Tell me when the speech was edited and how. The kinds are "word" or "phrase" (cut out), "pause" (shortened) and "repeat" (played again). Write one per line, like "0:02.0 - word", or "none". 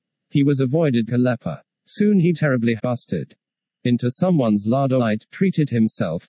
0:01.1 - word
0:02.3 - word
0:02.8 - word
0:03.5 - pause
0:05.0 - word